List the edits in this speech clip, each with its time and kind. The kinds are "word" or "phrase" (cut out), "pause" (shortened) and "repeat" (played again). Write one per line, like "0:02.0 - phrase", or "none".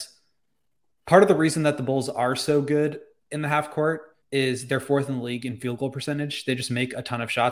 0:04.2 - pause